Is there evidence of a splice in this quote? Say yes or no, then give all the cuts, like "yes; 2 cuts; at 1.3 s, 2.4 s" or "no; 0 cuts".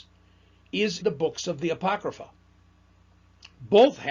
yes; 1 cut; at 1.0 s